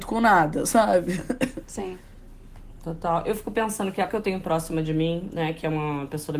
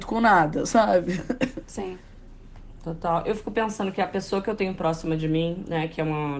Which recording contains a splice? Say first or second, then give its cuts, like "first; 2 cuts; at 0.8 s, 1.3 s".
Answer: first; 1 cut; at 4.1 s